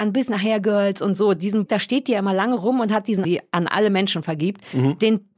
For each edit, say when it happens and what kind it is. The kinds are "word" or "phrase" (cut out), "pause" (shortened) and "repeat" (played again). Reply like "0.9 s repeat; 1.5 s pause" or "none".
1.7 s word; 3.2 s phrase